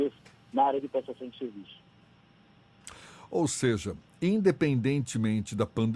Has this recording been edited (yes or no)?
no